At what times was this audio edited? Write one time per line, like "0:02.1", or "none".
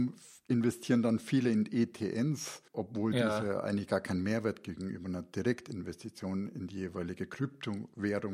0:02.7